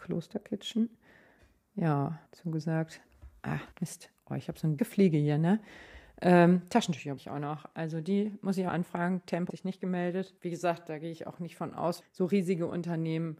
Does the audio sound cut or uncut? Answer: cut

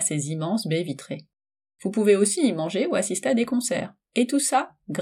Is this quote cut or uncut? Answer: uncut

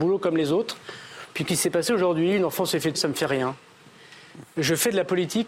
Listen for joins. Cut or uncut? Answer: cut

